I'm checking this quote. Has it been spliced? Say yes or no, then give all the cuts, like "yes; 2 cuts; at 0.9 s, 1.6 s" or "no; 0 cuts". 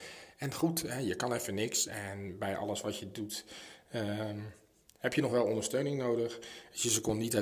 no; 0 cuts